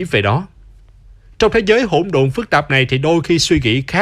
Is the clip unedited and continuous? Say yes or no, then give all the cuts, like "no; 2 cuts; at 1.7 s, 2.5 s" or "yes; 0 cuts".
yes; 0 cuts